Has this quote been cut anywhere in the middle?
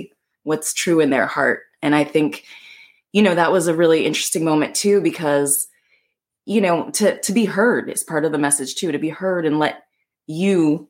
no; 0 cuts

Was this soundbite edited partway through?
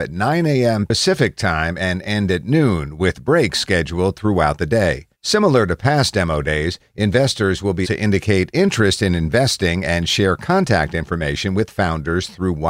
yes; 2 cuts; at 5.1 s, 7.8 s

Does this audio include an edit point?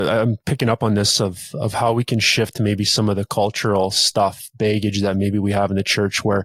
no; 0 cuts

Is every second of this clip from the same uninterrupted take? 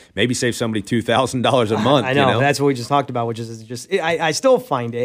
yes; 0 cuts

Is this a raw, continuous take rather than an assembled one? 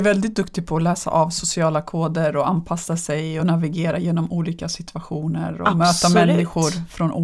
yes; 0 cuts

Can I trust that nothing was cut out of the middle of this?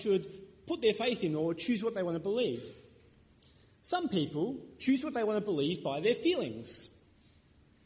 yes; 0 cuts

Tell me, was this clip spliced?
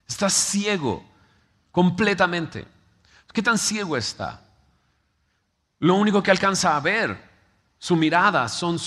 no; 0 cuts

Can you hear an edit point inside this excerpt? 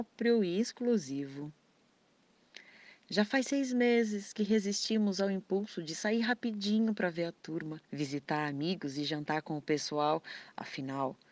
yes; 1 cut; at 7.8 s

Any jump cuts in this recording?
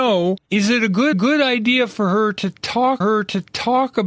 yes; 2 cuts; at 1.1 s, 3.0 s

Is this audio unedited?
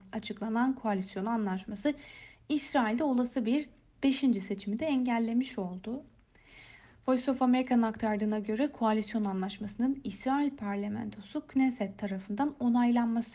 yes; 0 cuts

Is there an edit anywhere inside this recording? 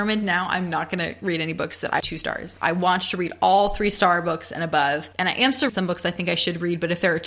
yes; 2 cuts; at 2.0 s, 5.7 s

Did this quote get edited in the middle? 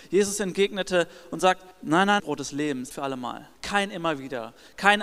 yes; 4 cuts; at 1.7 s, 2.2 s, 2.9 s, 3.6 s

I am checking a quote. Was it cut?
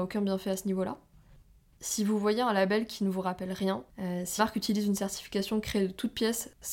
yes; 2 cuts; at 3.9 s, 4.4 s

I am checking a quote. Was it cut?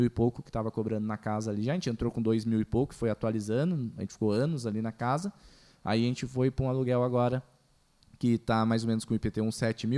no; 0 cuts

